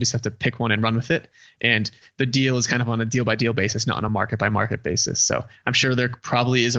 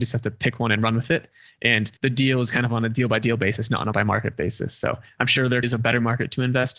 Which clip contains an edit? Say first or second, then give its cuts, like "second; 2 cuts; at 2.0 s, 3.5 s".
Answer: second; 3 cuts; at 2.0 s, 3.9 s, 5.6 s